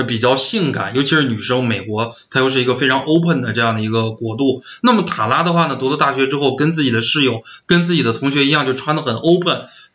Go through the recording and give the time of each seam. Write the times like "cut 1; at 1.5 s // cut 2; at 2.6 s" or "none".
none